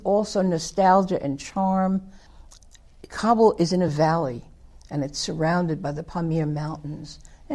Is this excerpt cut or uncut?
uncut